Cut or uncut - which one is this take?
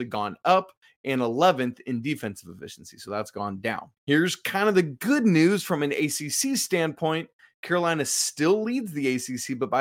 cut